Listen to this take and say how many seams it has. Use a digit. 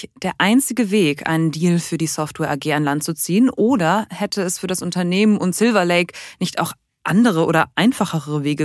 0